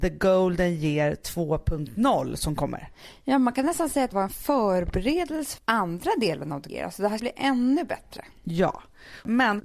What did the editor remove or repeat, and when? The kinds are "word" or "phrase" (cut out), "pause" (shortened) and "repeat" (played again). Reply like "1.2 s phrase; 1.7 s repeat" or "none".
4.1 s word; 5.6 s word; 6.7 s word; 7.2 s word